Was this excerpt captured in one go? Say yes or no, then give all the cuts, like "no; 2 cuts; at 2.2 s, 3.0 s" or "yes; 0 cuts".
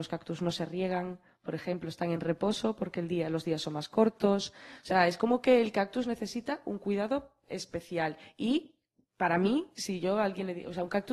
yes; 0 cuts